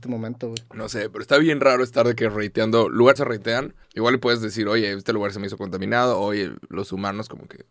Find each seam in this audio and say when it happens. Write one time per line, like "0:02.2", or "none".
0:03.2
0:03.8